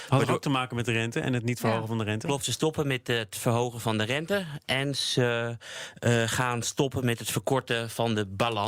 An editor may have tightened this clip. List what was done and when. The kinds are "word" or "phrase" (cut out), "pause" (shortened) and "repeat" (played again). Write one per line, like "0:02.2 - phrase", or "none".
none